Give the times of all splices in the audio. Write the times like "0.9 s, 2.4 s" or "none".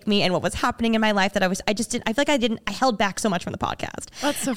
none